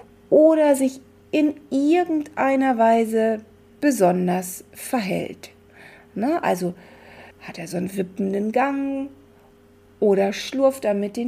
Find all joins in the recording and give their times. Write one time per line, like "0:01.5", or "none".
0:07.3